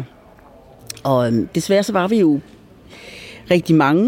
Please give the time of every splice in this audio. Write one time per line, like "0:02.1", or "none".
none